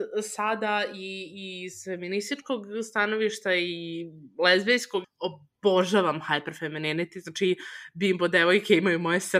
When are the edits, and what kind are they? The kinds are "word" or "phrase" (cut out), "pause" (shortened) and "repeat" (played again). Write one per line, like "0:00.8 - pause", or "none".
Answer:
0:05.0 - phrase